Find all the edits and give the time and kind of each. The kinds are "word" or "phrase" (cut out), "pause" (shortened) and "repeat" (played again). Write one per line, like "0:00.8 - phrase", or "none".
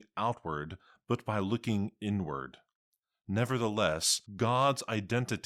0:04.3 - pause